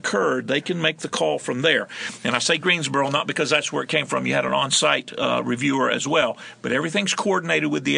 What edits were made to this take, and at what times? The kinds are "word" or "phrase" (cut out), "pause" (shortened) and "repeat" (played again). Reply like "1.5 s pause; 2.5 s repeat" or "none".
none